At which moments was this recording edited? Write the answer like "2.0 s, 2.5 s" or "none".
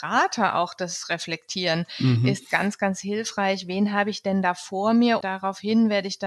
2.5 s, 5.2 s